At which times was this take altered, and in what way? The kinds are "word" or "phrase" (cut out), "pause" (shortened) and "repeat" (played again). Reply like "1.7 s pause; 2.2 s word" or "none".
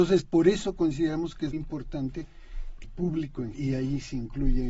1.5 s word; 2.8 s word; 3.5 s word

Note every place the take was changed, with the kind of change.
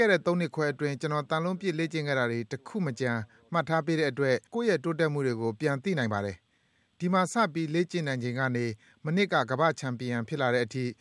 4.5 s pause

